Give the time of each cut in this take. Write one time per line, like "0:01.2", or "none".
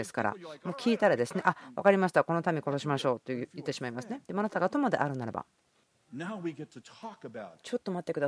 0:04.2
0:05.9